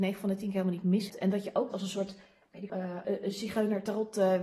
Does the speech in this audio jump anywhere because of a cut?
yes; 4 cuts; at 1.1 s, 1.7 s, 2.7 s, 3.0 s

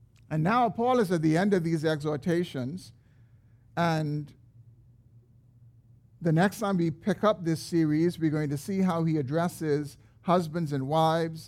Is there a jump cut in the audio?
no; 0 cuts

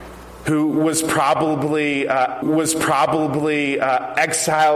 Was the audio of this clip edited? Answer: yes; 1 cut; at 2.4 s

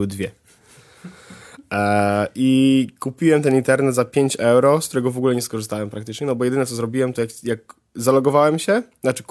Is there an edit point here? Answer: no; 0 cuts

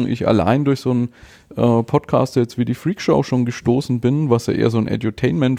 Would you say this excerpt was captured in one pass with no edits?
yes; 0 cuts

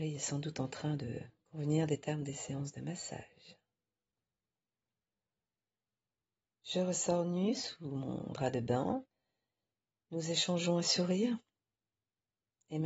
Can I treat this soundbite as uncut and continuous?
yes; 0 cuts

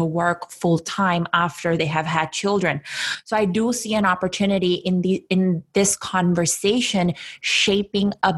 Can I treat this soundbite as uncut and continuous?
yes; 0 cuts

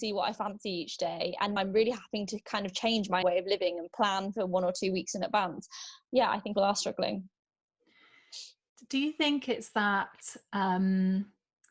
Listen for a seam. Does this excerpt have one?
yes; 3 cuts; at 1.6 s, 3.2 s, 6.6 s

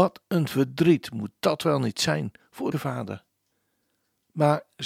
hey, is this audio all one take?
no; 1 cut; at 2.7 s

